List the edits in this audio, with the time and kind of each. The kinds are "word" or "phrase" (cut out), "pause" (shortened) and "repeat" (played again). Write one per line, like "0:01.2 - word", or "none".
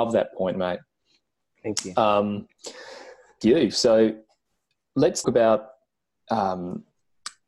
0:03.4 - word
0:05.2 - word

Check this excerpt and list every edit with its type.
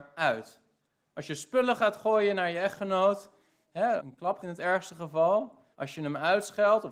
0:04.0 - word
0:04.4 - word
0:05.7 - pause

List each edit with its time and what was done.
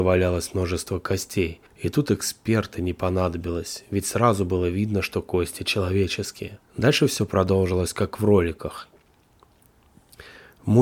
0:01.7 - pause
0:06.7 - pause

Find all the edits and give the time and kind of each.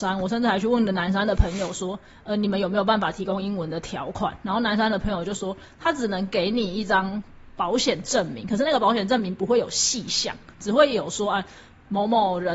none

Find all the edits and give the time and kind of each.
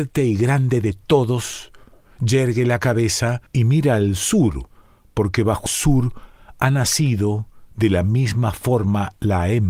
0:03.5 - pause
0:05.7 - phrase

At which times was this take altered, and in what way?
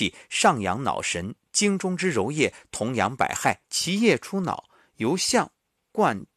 0:03.6 - pause

